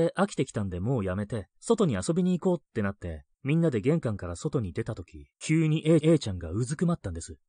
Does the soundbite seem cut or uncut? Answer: cut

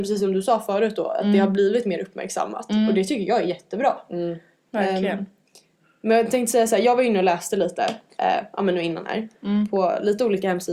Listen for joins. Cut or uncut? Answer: uncut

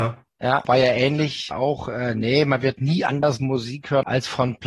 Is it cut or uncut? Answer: uncut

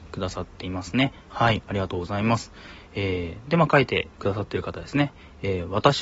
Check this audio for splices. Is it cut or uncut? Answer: cut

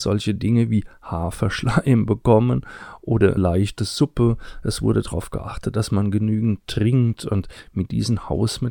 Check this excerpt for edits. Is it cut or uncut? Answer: cut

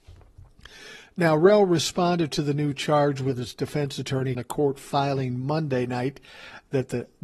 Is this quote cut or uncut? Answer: cut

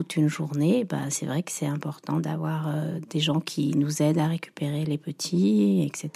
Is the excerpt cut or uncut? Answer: uncut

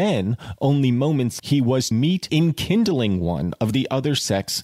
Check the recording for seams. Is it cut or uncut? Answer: cut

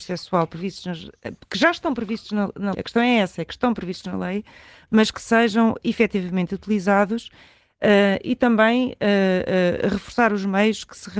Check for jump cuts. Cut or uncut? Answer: cut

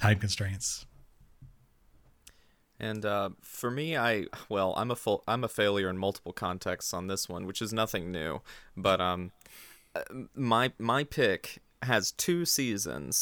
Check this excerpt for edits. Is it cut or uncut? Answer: cut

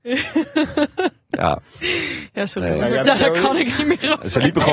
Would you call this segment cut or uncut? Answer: cut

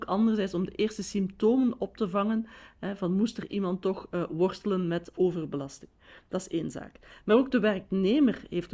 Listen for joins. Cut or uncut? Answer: uncut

